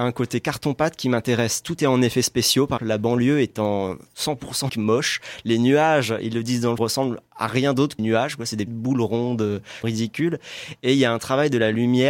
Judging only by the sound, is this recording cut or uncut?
cut